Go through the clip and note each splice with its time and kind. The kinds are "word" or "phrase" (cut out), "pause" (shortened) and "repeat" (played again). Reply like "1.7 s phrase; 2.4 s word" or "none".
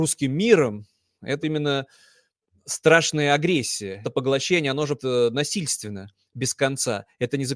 1.4 s word; 4.0 s word; 5.0 s word

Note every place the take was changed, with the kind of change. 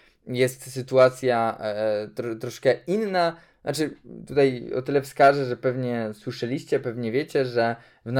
none

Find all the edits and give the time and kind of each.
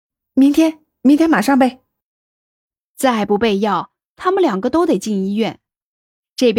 none

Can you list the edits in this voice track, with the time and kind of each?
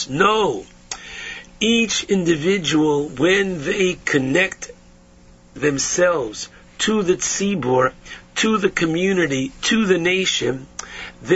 none

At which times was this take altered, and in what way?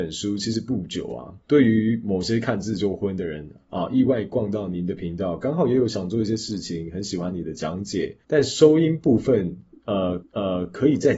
1.4 s pause; 8.2 s pause; 10.2 s repeat

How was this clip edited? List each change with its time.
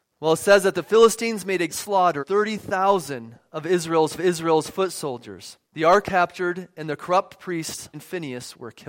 1.7 s word; 2.2 s word; 4.2 s repeat; 5.7 s pause; 6.0 s word; 7.9 s word

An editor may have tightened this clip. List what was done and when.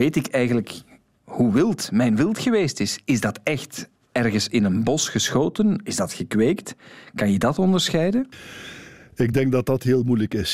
none

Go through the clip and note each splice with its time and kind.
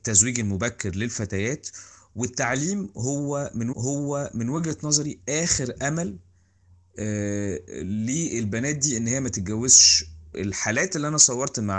3.7 s repeat; 10.3 s phrase

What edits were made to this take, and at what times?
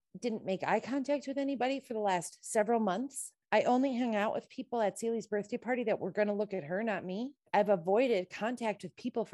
3.4 s pause

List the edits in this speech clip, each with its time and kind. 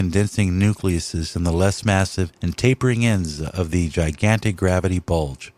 2.4 s pause

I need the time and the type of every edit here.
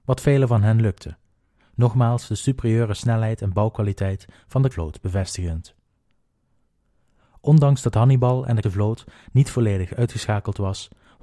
4.7 s word; 8.6 s word

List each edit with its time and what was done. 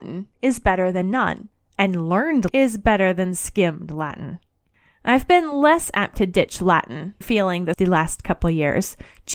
2.5 s word; 7.2 s word; 7.7 s word

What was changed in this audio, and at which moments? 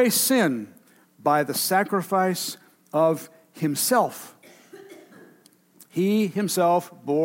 none

